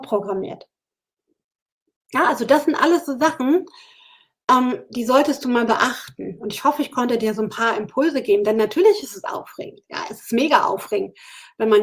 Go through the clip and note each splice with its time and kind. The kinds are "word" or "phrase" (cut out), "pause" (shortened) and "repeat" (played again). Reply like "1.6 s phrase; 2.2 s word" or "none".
none